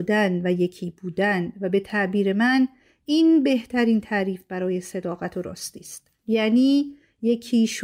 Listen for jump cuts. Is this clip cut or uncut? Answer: uncut